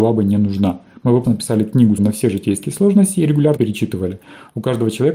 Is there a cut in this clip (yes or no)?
yes